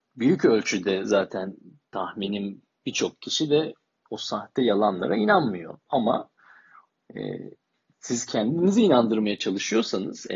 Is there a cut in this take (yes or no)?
no